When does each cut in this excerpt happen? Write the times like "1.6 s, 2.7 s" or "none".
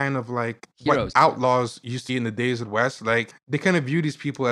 1.1 s, 2.1 s, 2.6 s